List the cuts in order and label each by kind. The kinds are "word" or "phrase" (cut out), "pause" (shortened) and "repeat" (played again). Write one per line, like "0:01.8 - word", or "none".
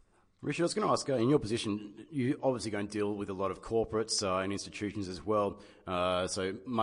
none